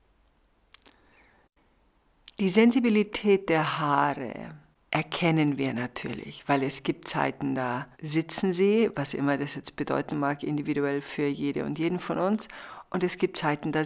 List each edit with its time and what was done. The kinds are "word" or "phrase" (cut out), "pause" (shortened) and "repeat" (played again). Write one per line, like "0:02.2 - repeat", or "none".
0:07.9 - pause